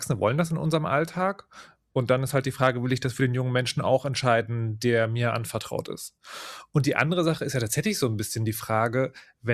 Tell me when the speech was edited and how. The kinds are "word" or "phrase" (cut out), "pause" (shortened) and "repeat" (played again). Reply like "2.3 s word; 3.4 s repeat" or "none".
none